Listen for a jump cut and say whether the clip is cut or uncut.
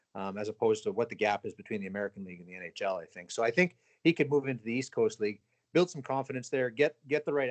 uncut